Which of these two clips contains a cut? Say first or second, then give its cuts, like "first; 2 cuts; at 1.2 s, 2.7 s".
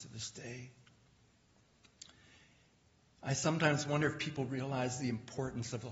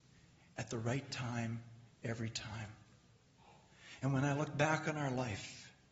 second; 1 cut; at 1.9 s